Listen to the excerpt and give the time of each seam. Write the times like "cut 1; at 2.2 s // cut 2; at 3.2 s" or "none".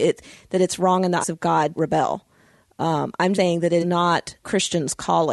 cut 1; at 1.2 s // cut 2; at 1.8 s // cut 3; at 3.3 s // cut 4; at 3.8 s // cut 5; at 4.4 s